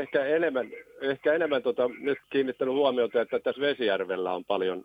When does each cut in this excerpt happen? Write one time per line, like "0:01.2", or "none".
0:02.2